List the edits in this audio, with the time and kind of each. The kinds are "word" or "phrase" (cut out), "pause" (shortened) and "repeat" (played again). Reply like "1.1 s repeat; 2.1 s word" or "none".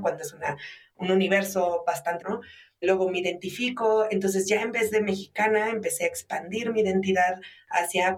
2.2 s phrase